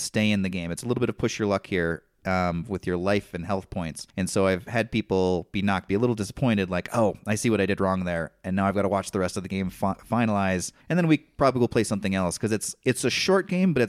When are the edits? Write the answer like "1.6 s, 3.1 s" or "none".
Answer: 4.1 s, 5.9 s, 10.8 s